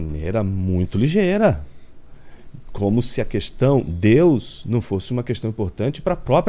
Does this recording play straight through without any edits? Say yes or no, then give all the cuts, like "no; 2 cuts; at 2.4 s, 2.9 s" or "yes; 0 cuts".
yes; 0 cuts